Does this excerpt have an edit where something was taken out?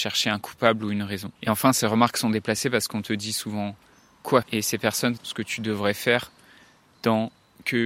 yes; 3 cuts; at 1.4 s, 4.4 s, 5.2 s

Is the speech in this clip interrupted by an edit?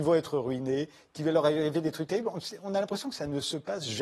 no; 0 cuts

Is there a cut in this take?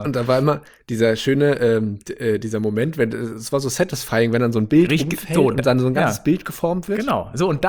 no; 0 cuts

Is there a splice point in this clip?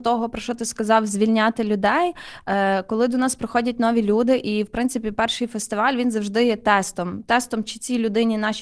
no; 0 cuts

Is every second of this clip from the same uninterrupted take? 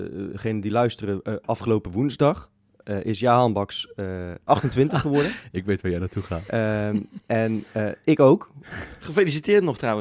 yes; 0 cuts

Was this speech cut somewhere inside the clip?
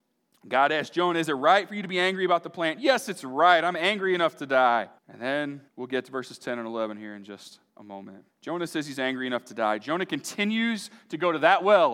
yes; 4 cuts; at 5.0 s, 5.7 s, 7.7 s, 8.3 s

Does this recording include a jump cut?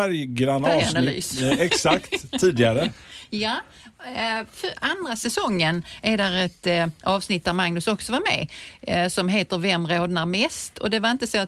no; 0 cuts

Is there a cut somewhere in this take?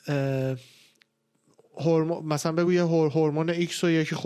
no; 0 cuts

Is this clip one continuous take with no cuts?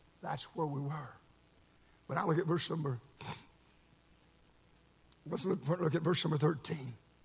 yes; 0 cuts

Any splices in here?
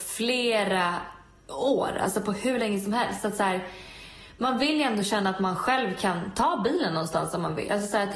no; 0 cuts

